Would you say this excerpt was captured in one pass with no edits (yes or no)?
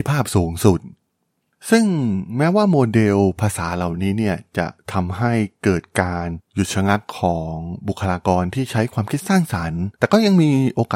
yes